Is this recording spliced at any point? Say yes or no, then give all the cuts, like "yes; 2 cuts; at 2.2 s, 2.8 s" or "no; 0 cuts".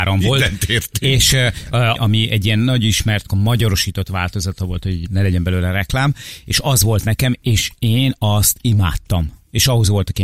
yes; 3 cuts; at 2.0 s, 3.3 s, 5.1 s